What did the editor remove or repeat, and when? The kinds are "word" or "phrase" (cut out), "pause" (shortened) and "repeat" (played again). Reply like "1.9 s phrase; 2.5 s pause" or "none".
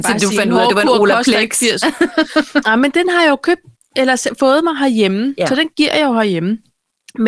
none